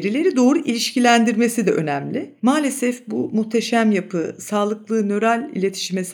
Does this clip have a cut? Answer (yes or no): no